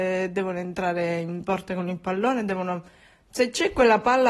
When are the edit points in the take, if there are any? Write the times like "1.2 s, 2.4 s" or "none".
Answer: none